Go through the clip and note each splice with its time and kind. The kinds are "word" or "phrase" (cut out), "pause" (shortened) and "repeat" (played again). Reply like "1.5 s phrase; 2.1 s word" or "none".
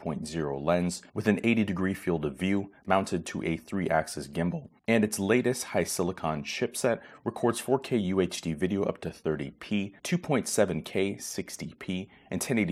1.1 s pause; 4.8 s pause; 10.0 s pause

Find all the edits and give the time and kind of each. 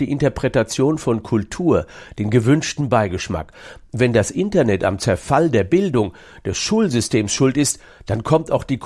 none

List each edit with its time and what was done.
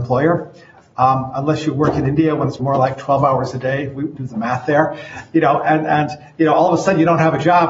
2.6 s word; 4.2 s word

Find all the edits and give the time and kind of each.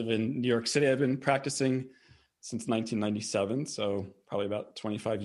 none

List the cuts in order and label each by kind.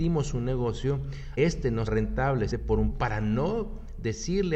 1.4 s word; 1.9 s word; 2.5 s word; 2.9 s word

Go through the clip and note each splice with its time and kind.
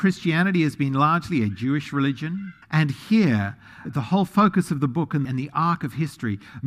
2.6 s pause; 3.8 s word; 5.2 s phrase

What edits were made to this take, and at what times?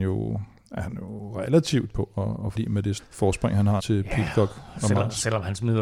1.9 s word; 2.6 s word; 3.0 s word; 3.8 s word

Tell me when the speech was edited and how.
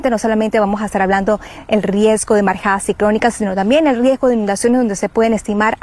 none

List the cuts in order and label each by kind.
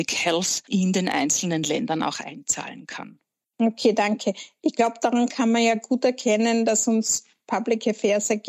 none

